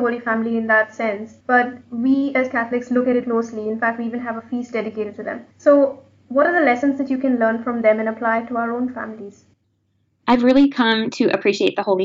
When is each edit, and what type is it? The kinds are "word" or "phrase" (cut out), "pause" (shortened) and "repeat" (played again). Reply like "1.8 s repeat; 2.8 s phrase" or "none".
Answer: 1.4 s pause; 3.2 s word; 5.5 s pause; 9.6 s pause